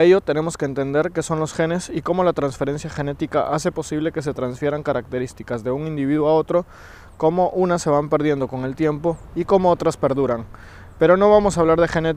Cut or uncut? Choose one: uncut